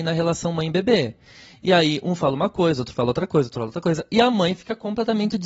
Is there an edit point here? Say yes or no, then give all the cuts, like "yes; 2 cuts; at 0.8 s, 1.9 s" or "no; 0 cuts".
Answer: no; 0 cuts